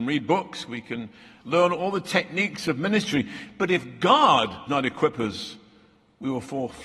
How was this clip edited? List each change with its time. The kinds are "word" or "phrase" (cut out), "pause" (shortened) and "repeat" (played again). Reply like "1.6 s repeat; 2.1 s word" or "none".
4.7 s word